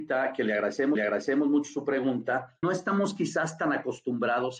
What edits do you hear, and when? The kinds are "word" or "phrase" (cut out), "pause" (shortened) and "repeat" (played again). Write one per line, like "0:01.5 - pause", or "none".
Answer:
0:01.0 - repeat
0:02.6 - word